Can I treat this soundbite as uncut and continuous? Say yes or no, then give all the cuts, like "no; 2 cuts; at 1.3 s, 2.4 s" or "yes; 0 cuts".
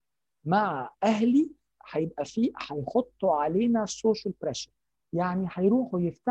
yes; 0 cuts